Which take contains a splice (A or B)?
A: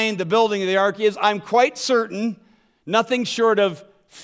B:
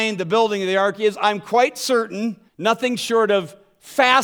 B